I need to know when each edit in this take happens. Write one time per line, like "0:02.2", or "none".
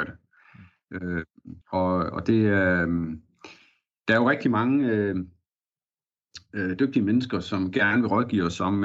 0:01.6